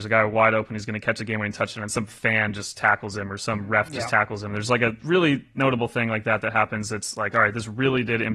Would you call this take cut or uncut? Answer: uncut